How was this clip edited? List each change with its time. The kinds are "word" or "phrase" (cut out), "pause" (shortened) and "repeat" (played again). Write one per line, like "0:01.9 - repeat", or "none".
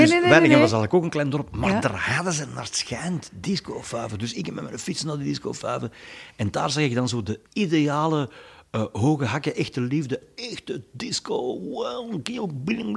0:07.5 - pause